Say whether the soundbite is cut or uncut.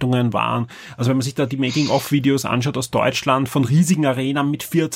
uncut